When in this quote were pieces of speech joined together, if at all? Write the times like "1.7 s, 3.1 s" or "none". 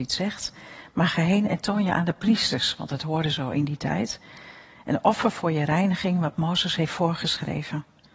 none